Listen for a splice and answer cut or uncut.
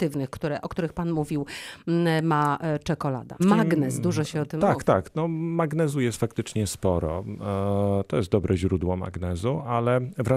uncut